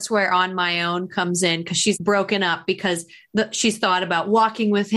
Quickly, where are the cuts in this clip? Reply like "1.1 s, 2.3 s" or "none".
1.9 s